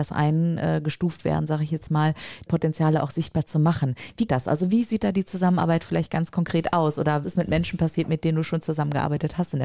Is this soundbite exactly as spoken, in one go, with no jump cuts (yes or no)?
no